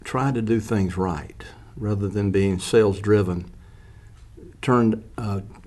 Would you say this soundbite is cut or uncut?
uncut